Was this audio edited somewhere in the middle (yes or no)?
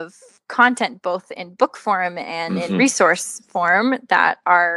no